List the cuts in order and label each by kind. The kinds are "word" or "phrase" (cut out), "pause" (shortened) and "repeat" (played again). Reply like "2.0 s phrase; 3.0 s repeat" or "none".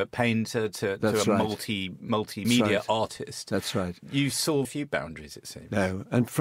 1.0 s word; 2.4 s word; 4.6 s word